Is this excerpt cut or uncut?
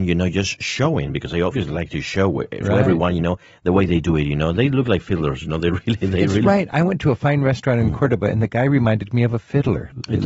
uncut